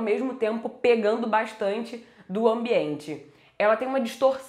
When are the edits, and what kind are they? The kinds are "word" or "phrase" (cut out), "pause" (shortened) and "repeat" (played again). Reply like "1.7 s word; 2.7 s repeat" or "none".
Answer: none